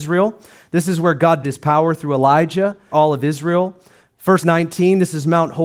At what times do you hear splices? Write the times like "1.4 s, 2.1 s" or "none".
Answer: 1.4 s, 2.9 s, 4.4 s